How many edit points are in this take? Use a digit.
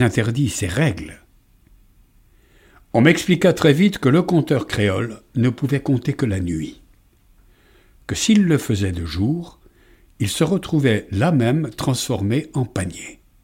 0